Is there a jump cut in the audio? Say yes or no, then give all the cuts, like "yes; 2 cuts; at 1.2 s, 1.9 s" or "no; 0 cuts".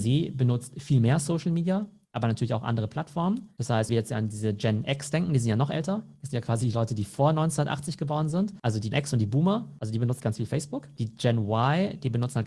yes; 3 cuts; at 3.9 s, 8.9 s, 10.2 s